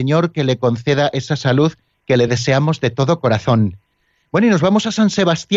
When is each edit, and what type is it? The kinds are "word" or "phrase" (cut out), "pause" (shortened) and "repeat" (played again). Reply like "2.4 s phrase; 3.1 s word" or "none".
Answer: none